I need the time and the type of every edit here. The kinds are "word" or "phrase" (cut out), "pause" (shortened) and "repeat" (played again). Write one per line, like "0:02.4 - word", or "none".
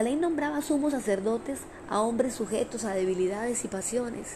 none